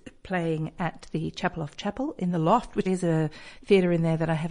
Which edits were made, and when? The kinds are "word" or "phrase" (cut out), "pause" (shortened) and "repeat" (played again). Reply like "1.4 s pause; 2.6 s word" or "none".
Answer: 2.9 s word